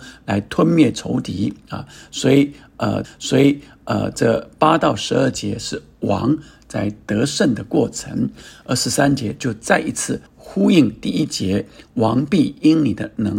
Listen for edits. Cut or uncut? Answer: cut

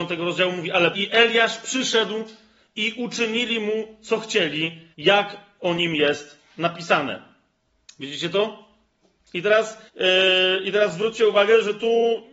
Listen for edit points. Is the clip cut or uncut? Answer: cut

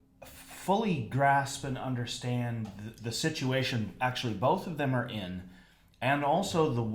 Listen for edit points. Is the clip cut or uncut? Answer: uncut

